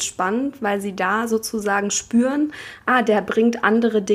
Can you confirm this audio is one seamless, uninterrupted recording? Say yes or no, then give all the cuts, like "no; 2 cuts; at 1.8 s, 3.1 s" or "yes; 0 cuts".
yes; 0 cuts